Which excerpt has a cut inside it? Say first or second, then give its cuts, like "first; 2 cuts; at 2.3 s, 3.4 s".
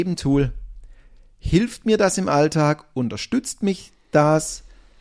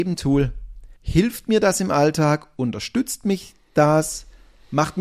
second; 1 cut; at 1.0 s